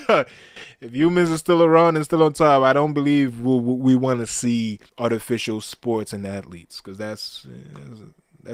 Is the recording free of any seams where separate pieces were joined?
no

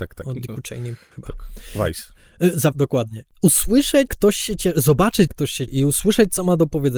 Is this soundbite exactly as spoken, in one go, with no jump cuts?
no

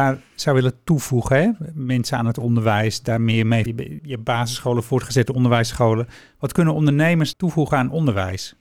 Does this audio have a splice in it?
yes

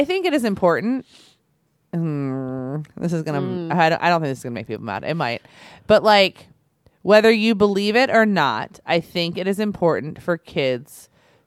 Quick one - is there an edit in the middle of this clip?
no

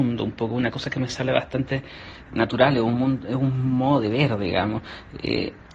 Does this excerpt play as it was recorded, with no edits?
yes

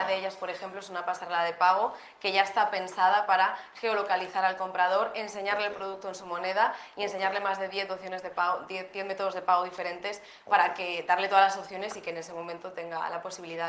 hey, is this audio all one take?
yes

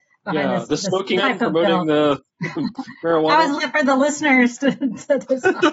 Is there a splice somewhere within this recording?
yes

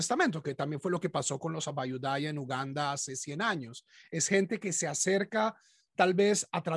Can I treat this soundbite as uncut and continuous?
yes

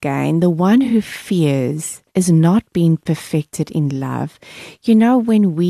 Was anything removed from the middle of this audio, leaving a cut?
yes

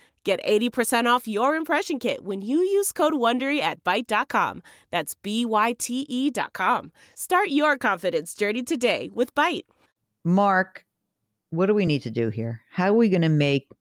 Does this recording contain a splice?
no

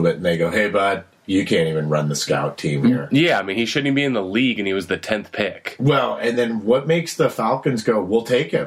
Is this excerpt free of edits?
yes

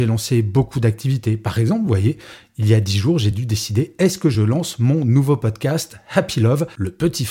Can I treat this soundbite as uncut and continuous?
yes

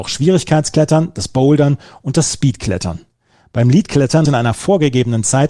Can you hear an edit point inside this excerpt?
yes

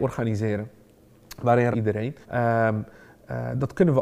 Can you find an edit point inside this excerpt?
yes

